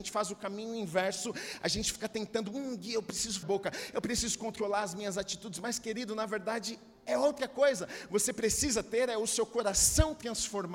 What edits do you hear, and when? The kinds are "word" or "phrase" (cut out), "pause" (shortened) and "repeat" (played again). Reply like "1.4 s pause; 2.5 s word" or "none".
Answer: 3.4 s phrase